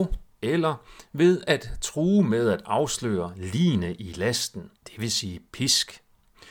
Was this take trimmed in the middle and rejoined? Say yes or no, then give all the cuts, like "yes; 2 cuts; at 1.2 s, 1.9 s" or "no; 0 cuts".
yes; 1 cut; at 4.8 s